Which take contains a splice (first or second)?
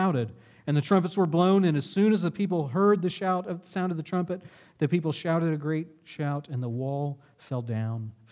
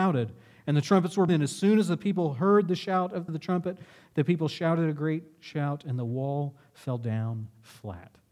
second